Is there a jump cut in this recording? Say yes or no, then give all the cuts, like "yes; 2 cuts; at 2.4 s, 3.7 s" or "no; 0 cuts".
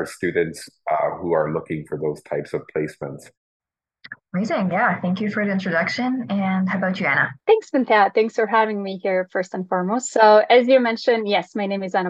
yes; 1 cut; at 7.4 s